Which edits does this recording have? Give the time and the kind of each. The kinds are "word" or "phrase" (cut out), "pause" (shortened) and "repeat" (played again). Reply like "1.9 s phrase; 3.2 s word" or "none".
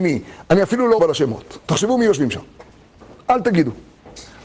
1.0 s phrase; 1.6 s pause